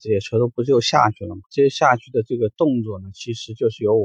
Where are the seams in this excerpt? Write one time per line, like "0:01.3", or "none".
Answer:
0:01.5